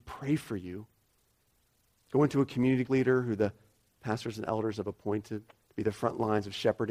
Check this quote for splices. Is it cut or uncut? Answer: cut